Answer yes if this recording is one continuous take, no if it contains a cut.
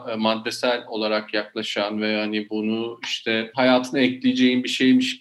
yes